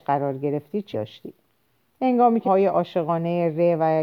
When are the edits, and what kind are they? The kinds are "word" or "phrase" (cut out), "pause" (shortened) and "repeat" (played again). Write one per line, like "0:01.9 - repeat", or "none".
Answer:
0:00.9 - word
0:02.4 - word